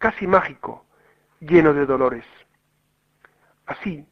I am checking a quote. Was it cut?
no; 0 cuts

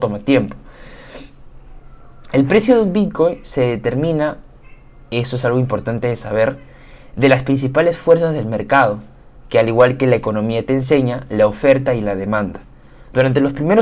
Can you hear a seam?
no; 0 cuts

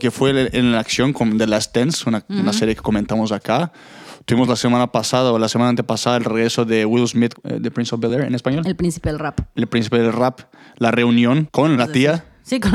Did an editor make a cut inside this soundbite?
no; 0 cuts

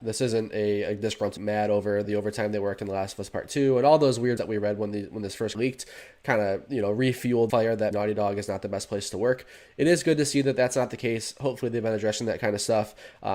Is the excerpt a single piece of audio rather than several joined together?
no; 6 cuts; at 1.4 s, 2.0 s, 4.4 s, 5.5 s, 7.5 s, 7.9 s

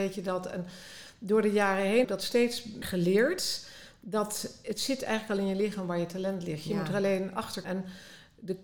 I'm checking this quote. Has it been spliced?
yes; 3 cuts; at 2.0 s, 2.8 s, 7.6 s

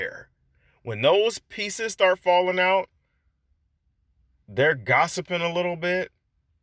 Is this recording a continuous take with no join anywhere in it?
yes; 0 cuts

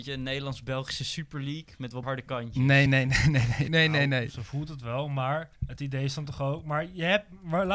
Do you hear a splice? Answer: yes; 4 cuts; at 2.0 s, 2.9 s, 3.7 s, 5.6 s

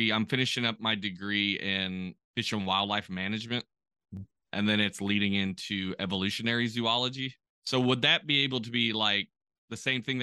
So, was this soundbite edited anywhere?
no; 0 cuts

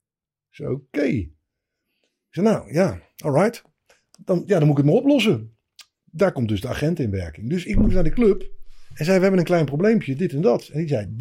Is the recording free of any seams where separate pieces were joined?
yes; 0 cuts

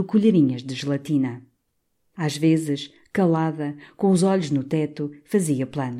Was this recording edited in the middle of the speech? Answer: no; 0 cuts

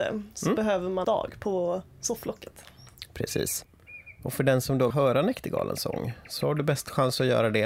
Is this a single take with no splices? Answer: no; 2 cuts; at 1.0 s, 4.9 s

